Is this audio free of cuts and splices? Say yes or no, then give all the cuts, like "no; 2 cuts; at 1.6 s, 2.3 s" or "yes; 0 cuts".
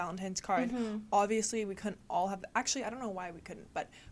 yes; 0 cuts